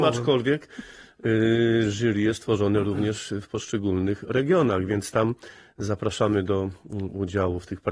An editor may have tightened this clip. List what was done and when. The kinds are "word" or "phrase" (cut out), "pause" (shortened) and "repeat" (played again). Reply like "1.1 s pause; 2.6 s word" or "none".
none